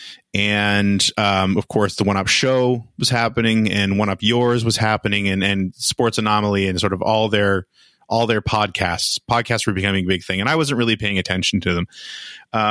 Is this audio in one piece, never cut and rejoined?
yes; 0 cuts

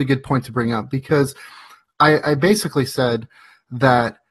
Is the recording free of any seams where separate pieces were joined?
yes; 0 cuts

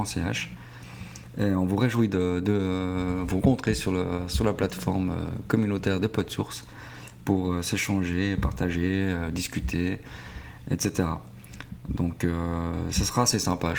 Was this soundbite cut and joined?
no; 0 cuts

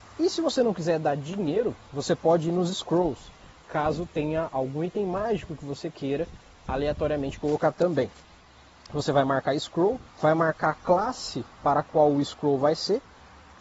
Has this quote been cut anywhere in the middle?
yes; 2 cuts; at 10.1 s, 11.5 s

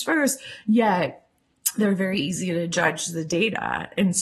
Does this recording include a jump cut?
no; 0 cuts

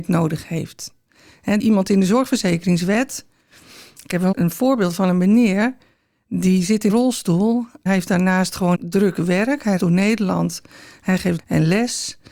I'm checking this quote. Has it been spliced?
yes; 7 cuts; at 1.6 s, 4.3 s, 6.9 s, 7.9 s, 8.7 s, 9.8 s, 11.4 s

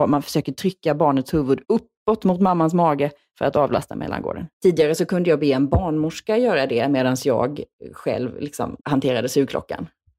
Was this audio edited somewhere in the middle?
yes; 3 cuts; at 1.6 s, 4.5 s, 8.8 s

